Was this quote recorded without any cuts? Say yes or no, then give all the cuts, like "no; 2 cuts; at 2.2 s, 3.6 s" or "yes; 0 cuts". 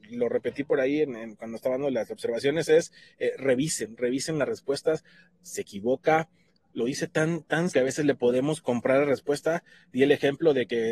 no; 1 cut; at 7.7 s